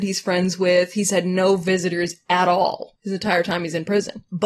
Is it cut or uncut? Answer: uncut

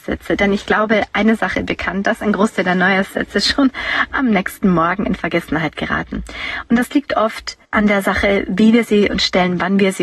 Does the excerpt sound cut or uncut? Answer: cut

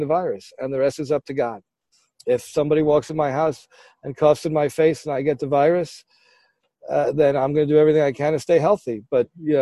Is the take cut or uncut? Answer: uncut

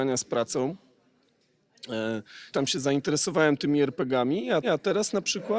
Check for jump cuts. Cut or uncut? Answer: cut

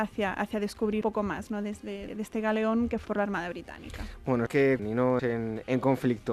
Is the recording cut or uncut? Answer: cut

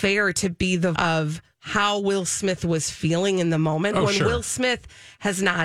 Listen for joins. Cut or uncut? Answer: cut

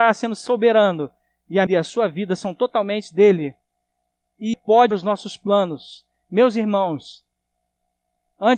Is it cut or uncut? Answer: cut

